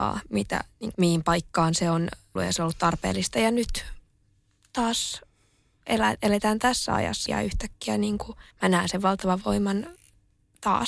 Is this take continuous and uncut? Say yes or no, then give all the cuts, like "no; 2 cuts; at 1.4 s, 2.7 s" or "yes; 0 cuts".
no; 4 cuts; at 0.9 s, 2.4 s, 7.3 s, 8.5 s